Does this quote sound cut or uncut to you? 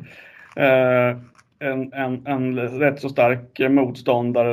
uncut